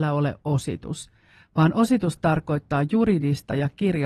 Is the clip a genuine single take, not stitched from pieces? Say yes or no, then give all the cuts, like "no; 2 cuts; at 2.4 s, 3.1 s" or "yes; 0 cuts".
yes; 0 cuts